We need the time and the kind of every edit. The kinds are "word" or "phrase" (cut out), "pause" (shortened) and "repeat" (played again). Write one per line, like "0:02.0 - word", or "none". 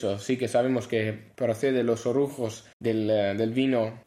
0:02.7 - pause